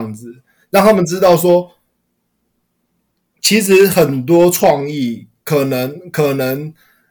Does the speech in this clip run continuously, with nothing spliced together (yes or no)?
yes